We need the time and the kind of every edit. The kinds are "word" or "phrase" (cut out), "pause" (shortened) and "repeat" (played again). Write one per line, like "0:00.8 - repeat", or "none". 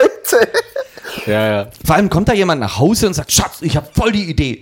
0:01.8 - pause